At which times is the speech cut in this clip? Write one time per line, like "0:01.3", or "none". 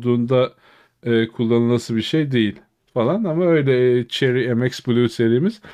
none